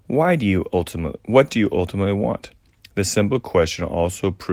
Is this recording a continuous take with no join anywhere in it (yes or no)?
yes